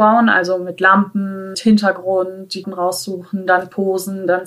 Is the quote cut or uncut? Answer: cut